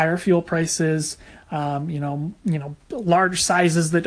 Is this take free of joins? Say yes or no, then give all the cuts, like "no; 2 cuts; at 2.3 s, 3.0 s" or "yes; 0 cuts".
yes; 0 cuts